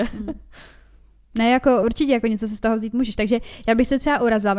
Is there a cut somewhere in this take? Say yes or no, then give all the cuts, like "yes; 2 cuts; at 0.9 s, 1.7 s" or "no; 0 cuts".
no; 0 cuts